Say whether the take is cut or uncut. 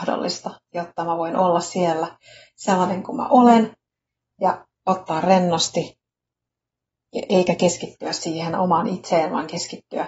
uncut